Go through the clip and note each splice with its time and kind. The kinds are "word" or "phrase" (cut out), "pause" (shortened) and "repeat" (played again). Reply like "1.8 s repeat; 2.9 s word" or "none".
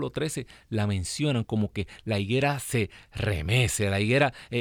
none